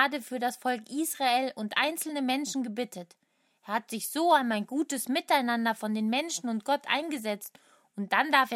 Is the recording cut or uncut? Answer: uncut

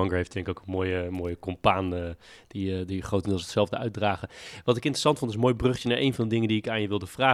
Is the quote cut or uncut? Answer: uncut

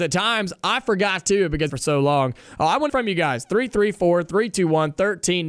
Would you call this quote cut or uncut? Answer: cut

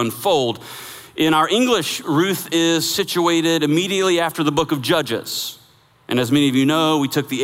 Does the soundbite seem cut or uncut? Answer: cut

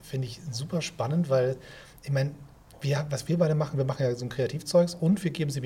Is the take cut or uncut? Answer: uncut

